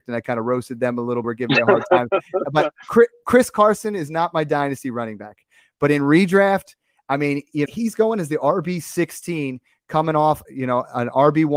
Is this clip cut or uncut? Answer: cut